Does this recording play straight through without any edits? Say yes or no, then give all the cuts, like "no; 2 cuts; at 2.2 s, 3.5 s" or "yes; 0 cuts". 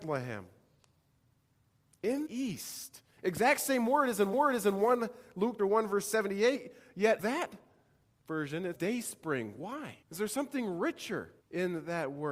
no; 7 cuts; at 2.3 s, 4.3 s, 5.6 s, 7.2 s, 8.7 s, 10.0 s, 11.4 s